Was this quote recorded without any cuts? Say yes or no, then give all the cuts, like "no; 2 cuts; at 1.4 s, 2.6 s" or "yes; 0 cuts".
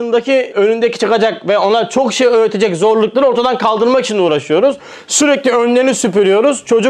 yes; 0 cuts